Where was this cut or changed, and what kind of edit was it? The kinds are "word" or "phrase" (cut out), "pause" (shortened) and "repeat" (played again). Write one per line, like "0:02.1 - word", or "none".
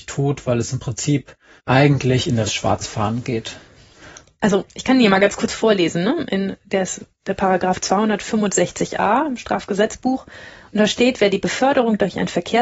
0:01.6 - pause
0:02.5 - phrase
0:04.7 - pause